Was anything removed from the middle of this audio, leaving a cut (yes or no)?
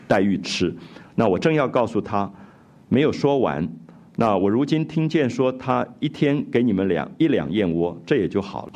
no